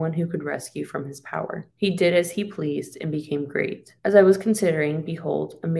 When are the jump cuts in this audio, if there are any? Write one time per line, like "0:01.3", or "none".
0:01.7
0:04.0